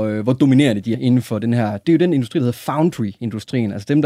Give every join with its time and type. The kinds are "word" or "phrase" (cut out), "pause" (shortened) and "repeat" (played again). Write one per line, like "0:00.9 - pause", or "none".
0:00.9 - word
0:01.8 - word